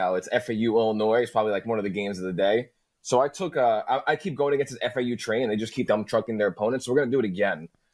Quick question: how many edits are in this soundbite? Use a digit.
1